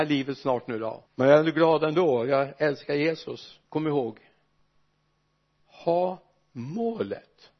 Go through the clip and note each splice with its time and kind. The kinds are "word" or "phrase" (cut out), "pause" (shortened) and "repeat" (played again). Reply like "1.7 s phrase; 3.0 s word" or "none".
1.1 s pause; 3.6 s pause

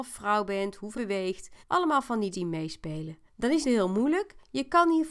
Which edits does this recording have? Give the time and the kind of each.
0.9 s word; 1.6 s pause; 2.3 s word; 3.3 s pause; 3.6 s phrase

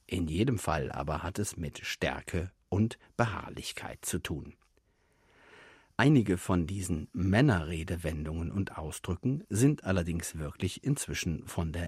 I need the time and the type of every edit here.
none

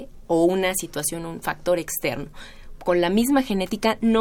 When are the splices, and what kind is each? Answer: none

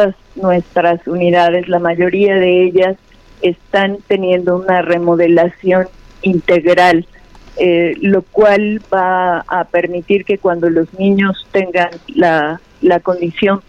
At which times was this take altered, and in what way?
none

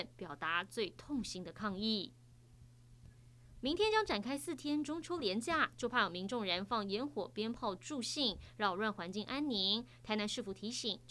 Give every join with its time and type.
none

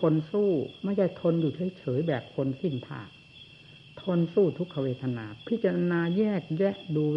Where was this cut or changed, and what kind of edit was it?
none

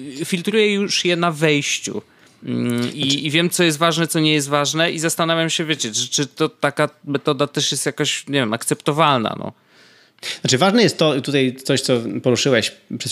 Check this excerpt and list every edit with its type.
none

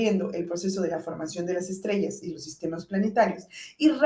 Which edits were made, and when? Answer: none

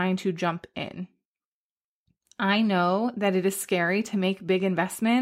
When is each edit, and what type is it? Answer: none

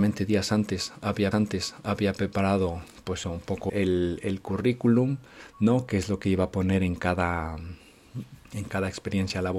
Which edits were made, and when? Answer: 1.3 s repeat; 3.2 s word; 3.7 s word; 8.5 s pause

